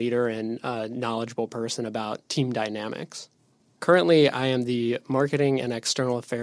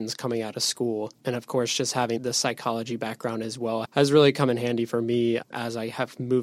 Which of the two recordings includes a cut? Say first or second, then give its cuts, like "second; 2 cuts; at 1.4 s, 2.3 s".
second; 3 cuts; at 1.2 s, 2.2 s, 3.8 s